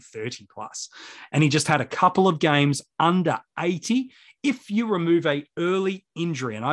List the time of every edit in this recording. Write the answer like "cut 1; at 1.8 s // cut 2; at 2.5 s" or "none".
none